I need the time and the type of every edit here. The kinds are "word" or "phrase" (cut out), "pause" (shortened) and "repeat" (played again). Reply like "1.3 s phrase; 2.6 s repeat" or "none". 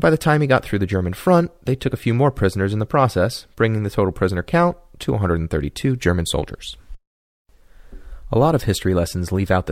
none